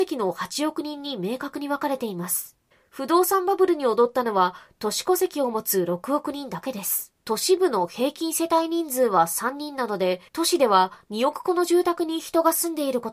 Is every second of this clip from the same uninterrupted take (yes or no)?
no